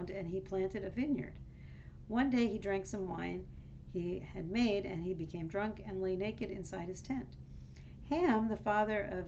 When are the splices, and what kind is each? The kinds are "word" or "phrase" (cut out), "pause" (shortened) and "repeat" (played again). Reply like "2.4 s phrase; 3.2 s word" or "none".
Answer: none